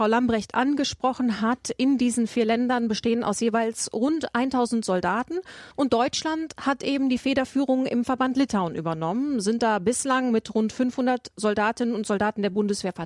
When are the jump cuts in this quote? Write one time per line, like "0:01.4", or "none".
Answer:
0:05.7